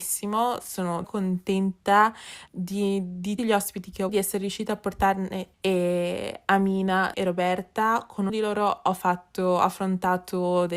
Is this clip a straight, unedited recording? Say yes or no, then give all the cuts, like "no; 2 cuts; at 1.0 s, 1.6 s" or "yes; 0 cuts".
no; 7 cuts; at 1.0 s, 2.5 s, 3.4 s, 4.1 s, 5.5 s, 7.1 s, 8.3 s